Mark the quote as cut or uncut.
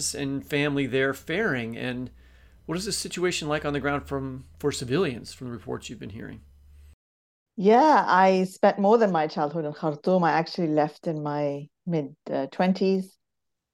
uncut